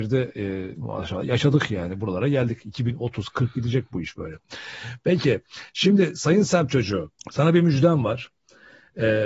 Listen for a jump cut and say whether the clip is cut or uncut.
cut